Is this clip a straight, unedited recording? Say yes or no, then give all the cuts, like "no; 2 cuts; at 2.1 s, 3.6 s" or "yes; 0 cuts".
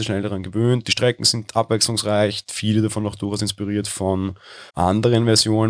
no; 2 cuts; at 1.5 s, 4.7 s